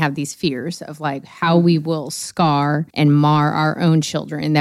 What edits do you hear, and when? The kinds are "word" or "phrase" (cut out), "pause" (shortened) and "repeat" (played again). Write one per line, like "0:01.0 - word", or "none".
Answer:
0:02.9 - pause